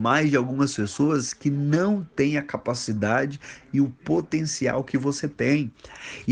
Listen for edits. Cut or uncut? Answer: uncut